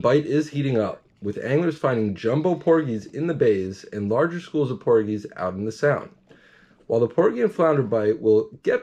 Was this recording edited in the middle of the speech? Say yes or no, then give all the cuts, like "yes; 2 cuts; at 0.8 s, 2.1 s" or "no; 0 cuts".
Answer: no; 0 cuts